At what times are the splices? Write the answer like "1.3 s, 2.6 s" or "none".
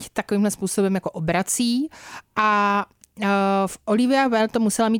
none